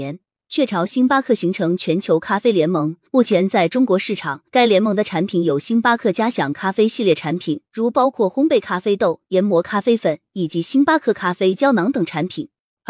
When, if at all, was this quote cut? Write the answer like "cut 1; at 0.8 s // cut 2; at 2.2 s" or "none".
cut 1; at 3.1 s // cut 2; at 4.5 s // cut 3; at 7.7 s